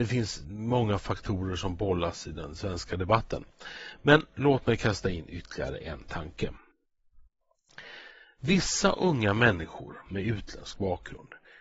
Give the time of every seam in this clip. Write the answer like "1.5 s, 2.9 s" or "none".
none